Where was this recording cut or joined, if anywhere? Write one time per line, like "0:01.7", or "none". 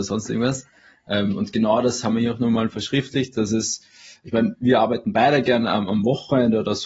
none